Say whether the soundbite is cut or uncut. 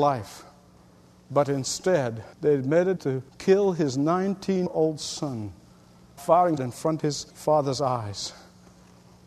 cut